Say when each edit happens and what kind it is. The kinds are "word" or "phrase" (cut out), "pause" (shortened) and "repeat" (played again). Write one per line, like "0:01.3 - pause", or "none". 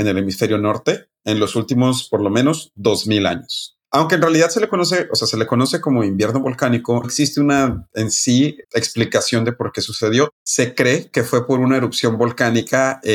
0:07.0 - word
0:08.6 - word